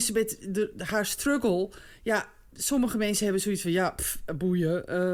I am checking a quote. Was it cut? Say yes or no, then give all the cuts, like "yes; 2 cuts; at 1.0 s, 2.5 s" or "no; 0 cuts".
no; 0 cuts